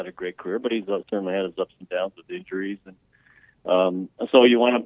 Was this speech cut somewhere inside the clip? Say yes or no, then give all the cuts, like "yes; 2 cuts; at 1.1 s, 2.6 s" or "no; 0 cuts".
no; 0 cuts